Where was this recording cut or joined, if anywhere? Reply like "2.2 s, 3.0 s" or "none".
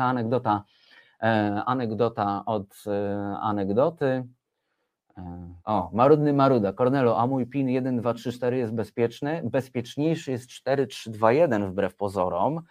5.6 s